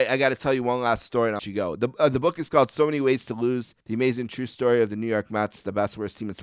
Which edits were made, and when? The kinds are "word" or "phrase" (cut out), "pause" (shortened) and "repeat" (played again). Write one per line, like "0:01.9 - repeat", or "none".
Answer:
0:01.4 - phrase
0:03.8 - pause